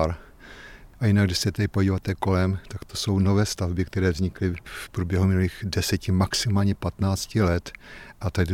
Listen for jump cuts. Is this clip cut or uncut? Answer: uncut